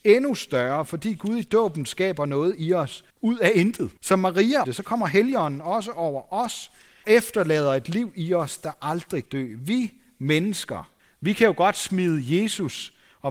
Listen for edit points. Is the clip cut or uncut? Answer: cut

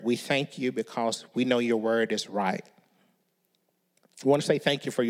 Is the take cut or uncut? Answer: uncut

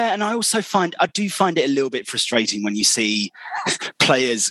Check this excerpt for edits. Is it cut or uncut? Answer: uncut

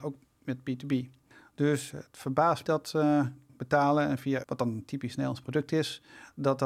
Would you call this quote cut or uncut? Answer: cut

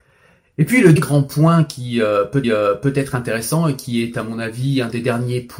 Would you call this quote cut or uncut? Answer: cut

